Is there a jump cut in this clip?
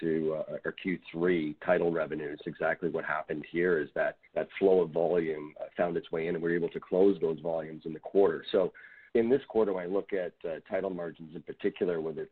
yes; 3 cuts; at 2.4 s, 4.3 s, 9.1 s

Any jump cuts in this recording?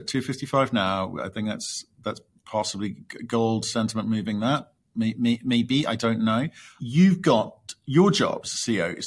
no; 0 cuts

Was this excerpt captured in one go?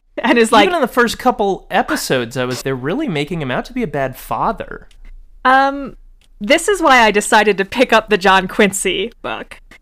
no; 1 cut; at 2.6 s

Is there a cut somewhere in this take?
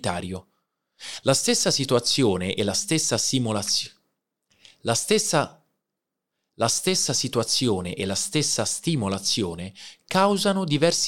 no; 0 cuts

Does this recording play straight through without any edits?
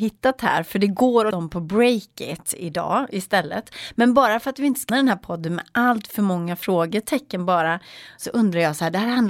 no; 2 cuts; at 1.3 s, 4.9 s

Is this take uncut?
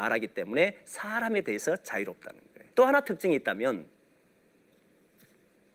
no; 1 cut; at 2.7 s

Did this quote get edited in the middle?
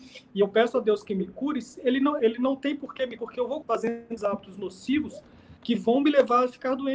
yes; 5 cuts; at 2.2 s, 3.2 s, 3.6 s, 4.2 s, 5.6 s

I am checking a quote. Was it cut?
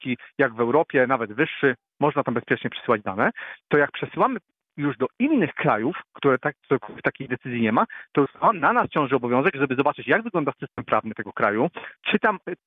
no; 0 cuts

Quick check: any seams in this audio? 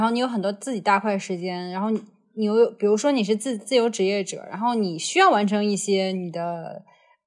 no; 0 cuts

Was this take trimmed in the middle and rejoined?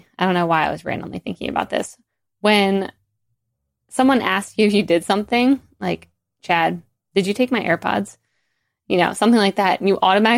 no; 0 cuts

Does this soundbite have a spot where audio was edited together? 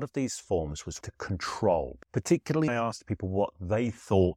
yes; 2 cuts; at 1.0 s, 2.7 s

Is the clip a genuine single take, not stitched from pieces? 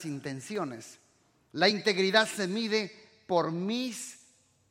yes; 0 cuts

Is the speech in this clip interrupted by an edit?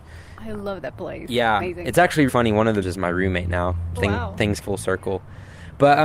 yes; 5 cuts; at 1.6 s, 2.3 s, 2.8 s, 4.0 s, 4.6 s

